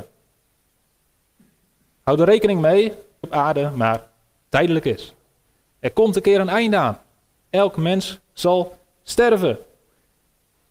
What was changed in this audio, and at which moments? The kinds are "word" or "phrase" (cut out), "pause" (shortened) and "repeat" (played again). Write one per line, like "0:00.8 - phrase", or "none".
0:03.2 - phrase